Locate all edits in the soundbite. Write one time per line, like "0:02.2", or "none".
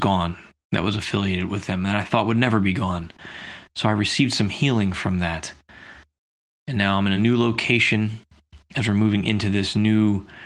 none